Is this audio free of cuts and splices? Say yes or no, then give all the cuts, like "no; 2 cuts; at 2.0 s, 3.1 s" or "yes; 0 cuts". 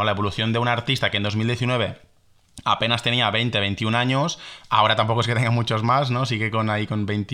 yes; 0 cuts